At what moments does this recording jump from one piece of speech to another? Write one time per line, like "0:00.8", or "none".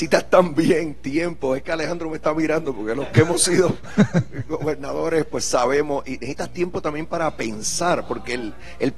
none

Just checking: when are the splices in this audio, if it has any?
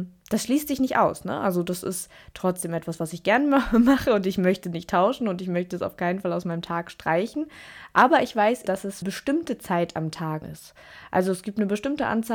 0:08.7
0:09.0
0:10.4

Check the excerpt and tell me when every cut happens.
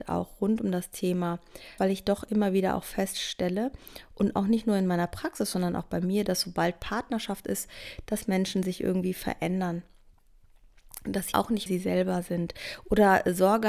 0:01.8
0:11.3
0:11.7

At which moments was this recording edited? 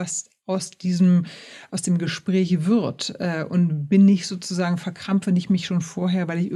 none

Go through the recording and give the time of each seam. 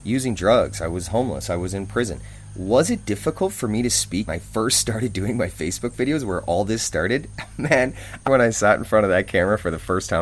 0:04.3
0:08.3

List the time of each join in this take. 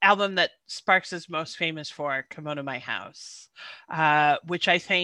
none

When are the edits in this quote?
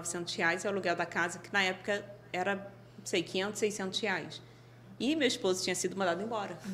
none

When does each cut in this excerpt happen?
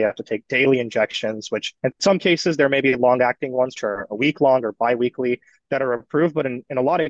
0:01.8
0:03.8

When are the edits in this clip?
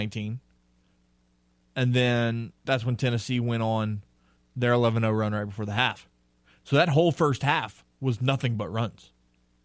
0:02.6

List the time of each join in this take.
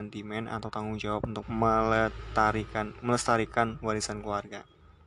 0:01.4

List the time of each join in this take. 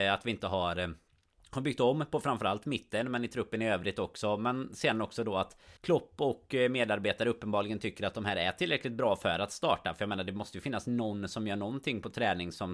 0:05.8

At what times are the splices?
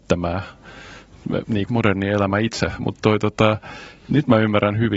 0:01.7
0:03.0

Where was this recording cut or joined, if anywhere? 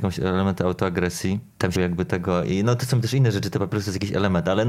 0:01.7

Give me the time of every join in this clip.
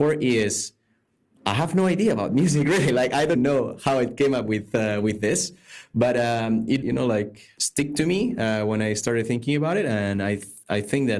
0:03.4
0:06.8

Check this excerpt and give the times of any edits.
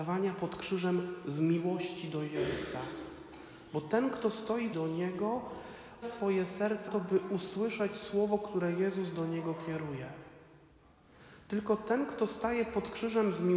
0:04.7
0:06.0
0:06.9

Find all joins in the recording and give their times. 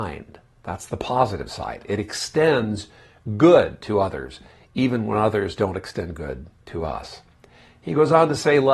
none

